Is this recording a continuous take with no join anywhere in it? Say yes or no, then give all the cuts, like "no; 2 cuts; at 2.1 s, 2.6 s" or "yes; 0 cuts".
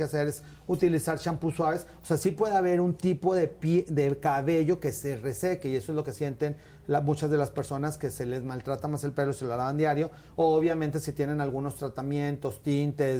yes; 0 cuts